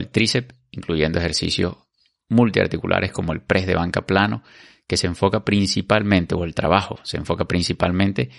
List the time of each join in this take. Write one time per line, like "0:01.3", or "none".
none